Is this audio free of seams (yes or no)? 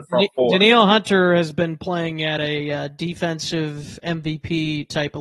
yes